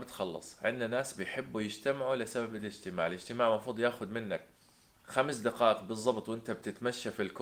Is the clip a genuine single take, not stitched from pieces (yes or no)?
yes